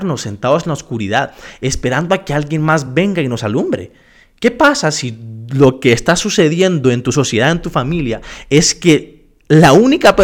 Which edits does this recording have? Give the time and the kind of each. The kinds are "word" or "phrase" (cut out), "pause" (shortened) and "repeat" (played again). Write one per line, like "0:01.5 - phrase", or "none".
none